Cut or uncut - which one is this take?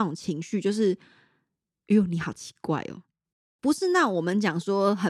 uncut